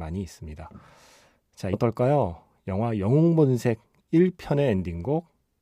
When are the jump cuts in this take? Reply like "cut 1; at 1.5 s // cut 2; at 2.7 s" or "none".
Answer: cut 1; at 1.7 s